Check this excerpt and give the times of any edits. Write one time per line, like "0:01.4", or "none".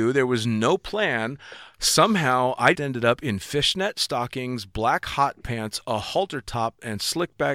0:02.7

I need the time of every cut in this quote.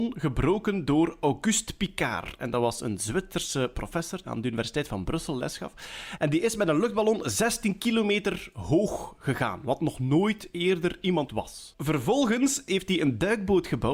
0:04.2
0:11.3

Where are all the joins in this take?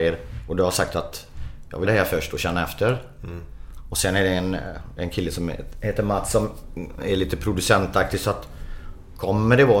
0:01.9

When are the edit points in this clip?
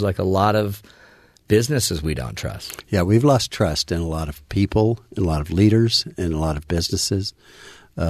none

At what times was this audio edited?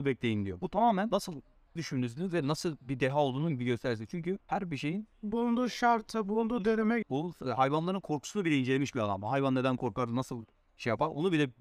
0:01.8
0:04.4
0:07.0

